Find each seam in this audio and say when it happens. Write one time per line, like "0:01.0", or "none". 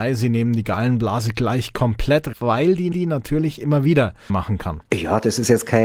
0:02.3
0:02.9
0:04.3